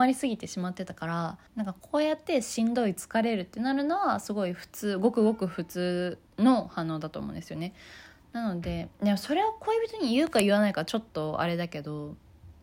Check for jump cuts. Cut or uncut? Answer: cut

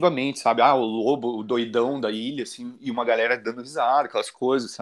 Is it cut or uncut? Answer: uncut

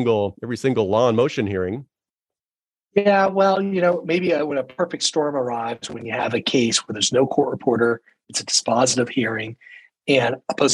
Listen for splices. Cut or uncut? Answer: uncut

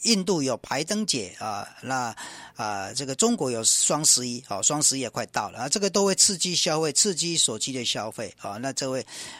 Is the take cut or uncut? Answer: uncut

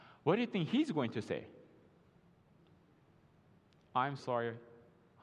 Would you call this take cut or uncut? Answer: cut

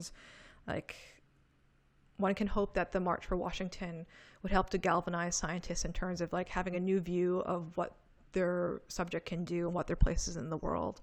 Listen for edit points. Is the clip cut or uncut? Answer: uncut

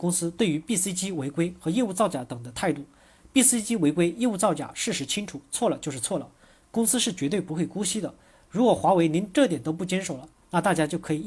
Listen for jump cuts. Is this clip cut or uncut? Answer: uncut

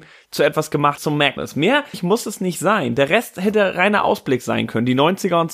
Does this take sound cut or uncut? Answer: cut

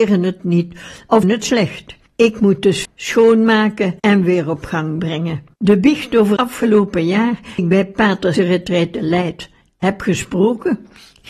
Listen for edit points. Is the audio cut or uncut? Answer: cut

